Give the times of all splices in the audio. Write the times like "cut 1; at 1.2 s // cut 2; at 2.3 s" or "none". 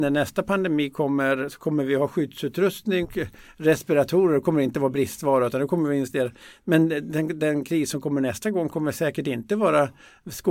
cut 1; at 3.0 s // cut 2; at 7.4 s